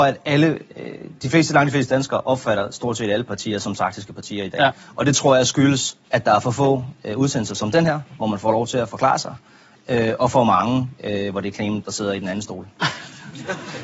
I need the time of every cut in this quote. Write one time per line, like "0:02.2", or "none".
0:06.0

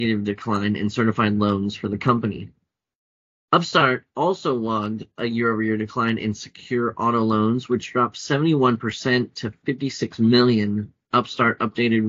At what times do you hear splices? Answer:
none

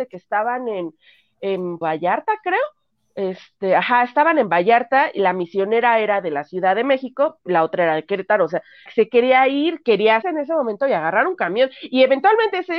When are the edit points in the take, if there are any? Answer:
0:01.8
0:08.9
0:10.2

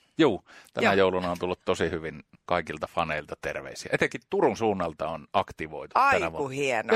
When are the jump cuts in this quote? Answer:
none

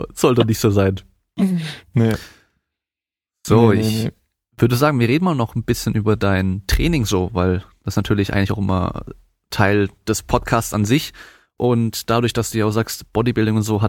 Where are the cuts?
none

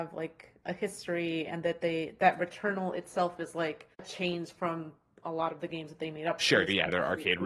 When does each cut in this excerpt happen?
0:03.9

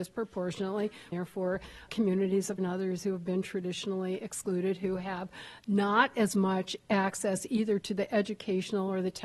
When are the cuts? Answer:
0:01.1
0:01.9
0:02.6

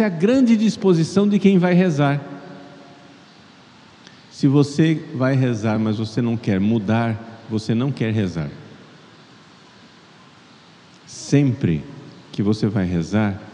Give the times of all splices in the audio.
none

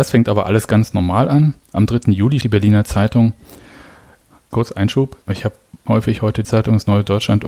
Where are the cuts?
0:02.4
0:04.5
0:05.2
0:05.9
0:06.4

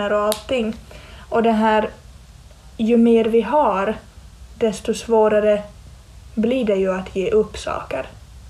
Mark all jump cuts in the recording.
none

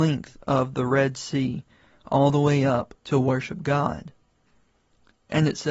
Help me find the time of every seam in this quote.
0:03.0

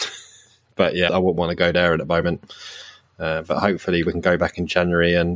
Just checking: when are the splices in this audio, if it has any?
0:01.1

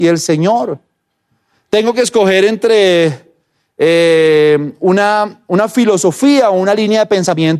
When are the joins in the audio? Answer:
none

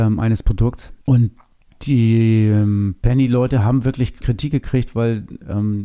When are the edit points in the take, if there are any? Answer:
0:01.0
0:04.2

